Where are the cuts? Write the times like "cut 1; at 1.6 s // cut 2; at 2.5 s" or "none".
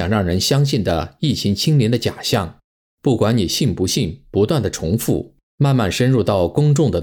cut 1; at 5.4 s